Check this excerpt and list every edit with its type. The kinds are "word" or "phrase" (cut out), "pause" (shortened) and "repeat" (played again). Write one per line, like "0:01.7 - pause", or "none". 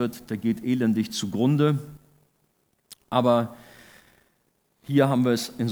none